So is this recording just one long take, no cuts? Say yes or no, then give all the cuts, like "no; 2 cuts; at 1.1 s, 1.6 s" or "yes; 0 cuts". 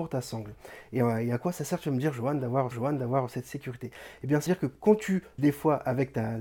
no; 3 cuts; at 2.7 s, 4.5 s, 5.4 s